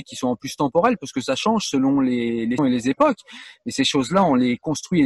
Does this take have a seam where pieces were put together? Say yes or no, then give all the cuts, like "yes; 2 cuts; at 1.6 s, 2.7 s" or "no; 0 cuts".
yes; 1 cut; at 2.6 s